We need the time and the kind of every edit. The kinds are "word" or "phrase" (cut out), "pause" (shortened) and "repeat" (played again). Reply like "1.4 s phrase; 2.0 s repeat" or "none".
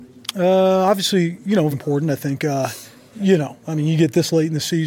1.7 s word